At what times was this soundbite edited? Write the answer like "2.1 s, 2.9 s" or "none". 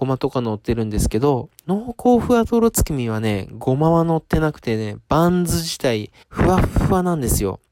1.6 s, 6.2 s